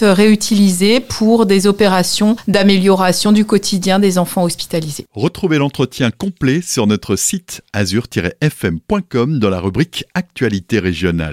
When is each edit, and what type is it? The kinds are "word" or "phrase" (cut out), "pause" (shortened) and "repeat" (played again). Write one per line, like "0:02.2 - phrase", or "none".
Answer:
none